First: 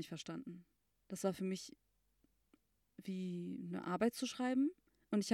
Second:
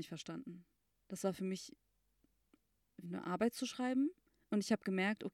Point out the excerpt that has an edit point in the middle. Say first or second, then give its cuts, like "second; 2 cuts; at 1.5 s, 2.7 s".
second; 1 cut; at 3.0 s